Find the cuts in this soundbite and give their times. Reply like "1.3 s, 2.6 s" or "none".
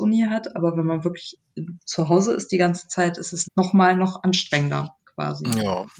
3.4 s